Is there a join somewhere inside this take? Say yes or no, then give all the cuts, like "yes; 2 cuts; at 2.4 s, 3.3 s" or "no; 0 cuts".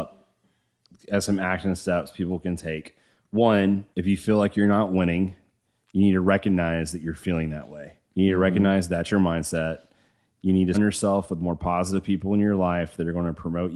yes; 3 cuts; at 3.9 s, 8.0 s, 10.7 s